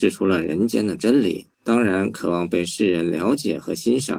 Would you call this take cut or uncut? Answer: cut